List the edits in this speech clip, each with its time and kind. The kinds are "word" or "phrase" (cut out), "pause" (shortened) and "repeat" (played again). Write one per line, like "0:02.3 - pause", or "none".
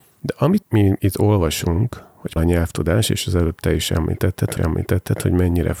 0:02.4 - word
0:04.6 - repeat